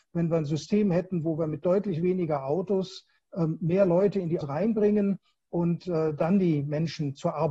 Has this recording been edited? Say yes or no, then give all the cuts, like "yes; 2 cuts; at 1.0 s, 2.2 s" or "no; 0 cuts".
yes; 1 cut; at 4.4 s